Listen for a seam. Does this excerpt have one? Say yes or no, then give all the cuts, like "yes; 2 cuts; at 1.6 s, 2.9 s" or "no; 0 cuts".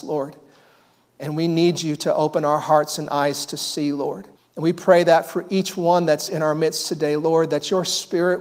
yes; 1 cut; at 4.4 s